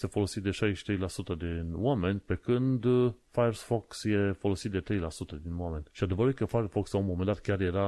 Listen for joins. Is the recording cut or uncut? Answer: cut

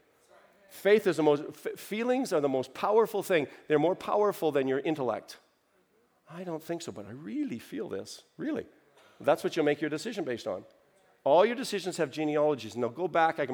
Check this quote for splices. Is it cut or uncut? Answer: uncut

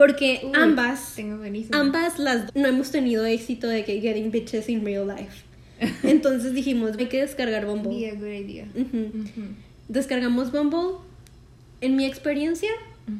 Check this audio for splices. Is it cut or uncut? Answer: cut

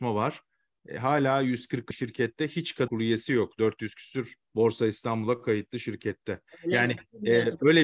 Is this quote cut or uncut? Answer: cut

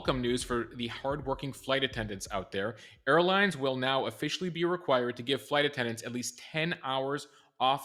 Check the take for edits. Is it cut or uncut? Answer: uncut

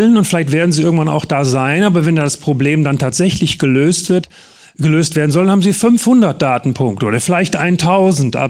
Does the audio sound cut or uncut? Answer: uncut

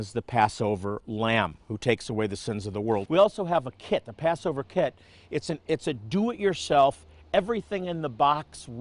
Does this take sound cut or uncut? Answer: uncut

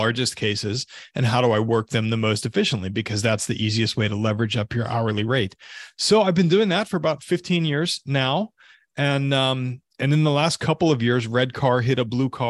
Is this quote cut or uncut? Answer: uncut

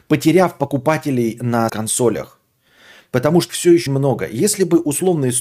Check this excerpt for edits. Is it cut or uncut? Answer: cut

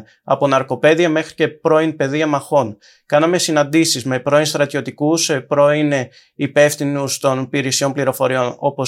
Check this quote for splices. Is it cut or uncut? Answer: uncut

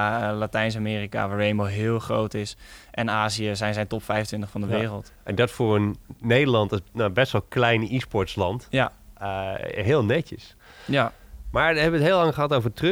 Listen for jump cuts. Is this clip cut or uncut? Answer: uncut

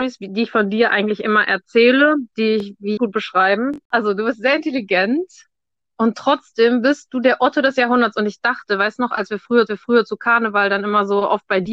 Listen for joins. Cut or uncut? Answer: cut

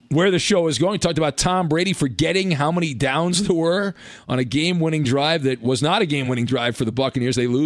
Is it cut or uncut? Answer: uncut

